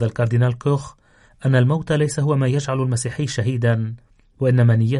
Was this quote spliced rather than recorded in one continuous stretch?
no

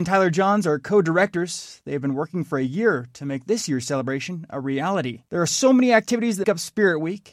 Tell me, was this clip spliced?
yes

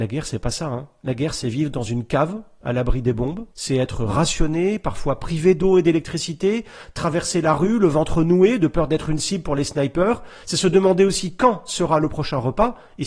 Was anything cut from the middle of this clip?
yes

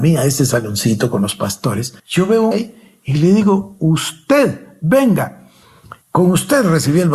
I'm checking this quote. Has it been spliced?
yes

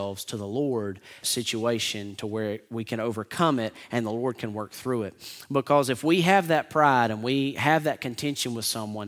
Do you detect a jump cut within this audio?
yes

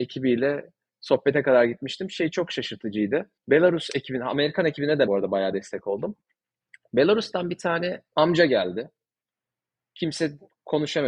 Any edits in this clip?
yes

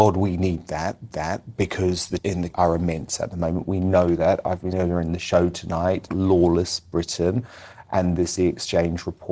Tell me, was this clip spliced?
yes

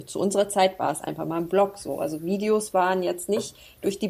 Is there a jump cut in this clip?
no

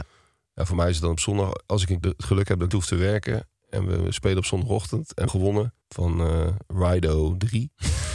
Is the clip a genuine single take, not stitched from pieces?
no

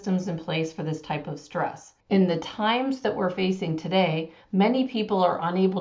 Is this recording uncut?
no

